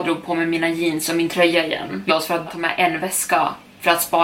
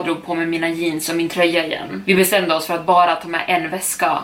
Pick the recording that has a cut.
first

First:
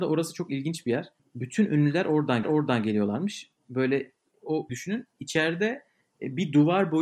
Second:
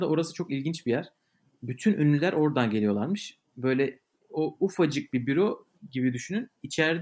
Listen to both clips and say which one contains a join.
first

